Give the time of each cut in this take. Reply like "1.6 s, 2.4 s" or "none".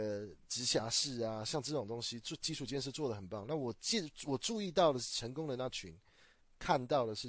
none